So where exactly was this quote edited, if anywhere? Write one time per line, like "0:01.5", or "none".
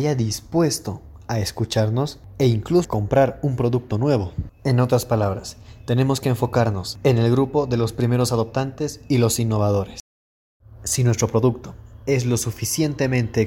0:02.8